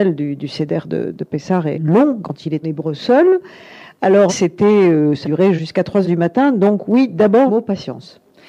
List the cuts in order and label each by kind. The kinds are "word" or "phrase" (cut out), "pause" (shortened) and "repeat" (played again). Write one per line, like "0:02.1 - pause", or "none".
0:01.1 - word
0:01.7 - word
0:02.2 - word
0:02.6 - word
0:04.3 - word
0:05.2 - word
0:05.6 - word
0:06.0 - word
0:07.5 - word